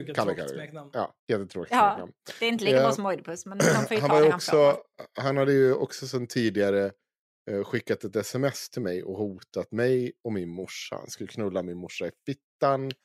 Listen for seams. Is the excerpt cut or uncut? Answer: cut